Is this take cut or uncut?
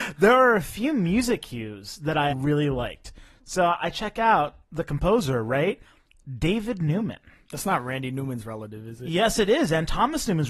cut